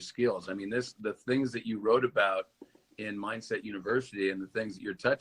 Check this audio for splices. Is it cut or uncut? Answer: uncut